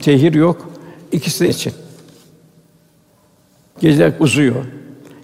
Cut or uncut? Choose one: cut